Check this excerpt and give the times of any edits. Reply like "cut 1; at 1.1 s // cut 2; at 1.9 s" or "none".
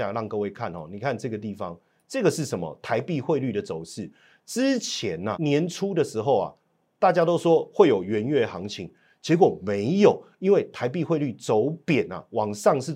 cut 1; at 5.3 s